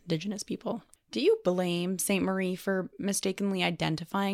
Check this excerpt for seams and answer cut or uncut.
uncut